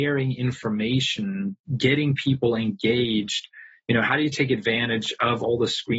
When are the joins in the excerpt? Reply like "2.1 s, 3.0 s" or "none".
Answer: 1.6 s